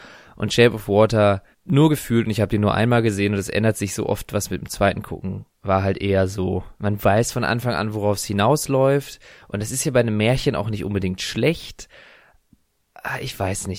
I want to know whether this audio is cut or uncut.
cut